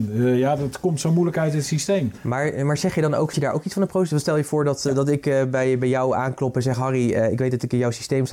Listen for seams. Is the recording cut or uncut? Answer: uncut